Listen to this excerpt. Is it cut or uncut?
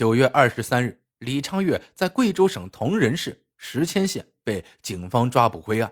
cut